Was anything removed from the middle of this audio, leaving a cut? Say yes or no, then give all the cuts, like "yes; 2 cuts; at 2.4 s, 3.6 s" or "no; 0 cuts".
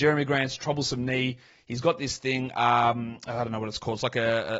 no; 0 cuts